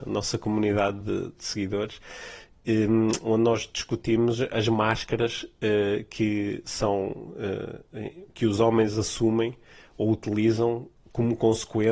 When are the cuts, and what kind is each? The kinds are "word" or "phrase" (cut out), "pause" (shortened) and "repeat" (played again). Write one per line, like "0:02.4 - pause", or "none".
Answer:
none

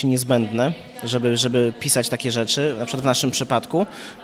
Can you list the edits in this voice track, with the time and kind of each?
none

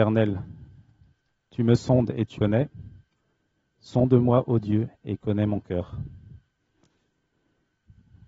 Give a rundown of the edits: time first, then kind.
0:02.4 - word

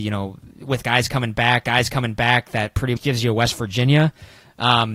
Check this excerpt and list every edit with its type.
0:01.6 - repeat
0:03.0 - word

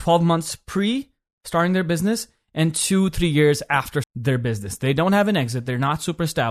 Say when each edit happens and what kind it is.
0:04.0 - word

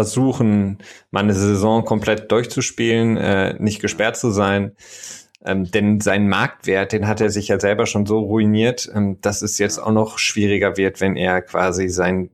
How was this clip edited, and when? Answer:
none

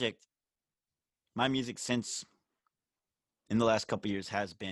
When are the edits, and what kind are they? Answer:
none

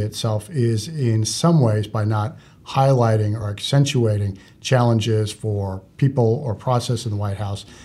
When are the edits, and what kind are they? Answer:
none

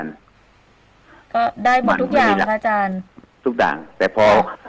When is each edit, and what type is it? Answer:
none

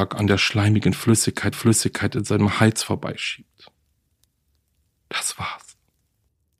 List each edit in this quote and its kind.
0:01.5 - repeat

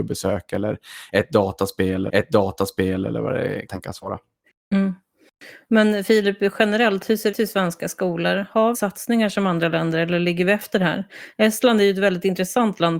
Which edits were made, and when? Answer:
0:02.1 - repeat
0:03.7 - word
0:04.4 - pause
0:07.3 - word
0:08.7 - phrase

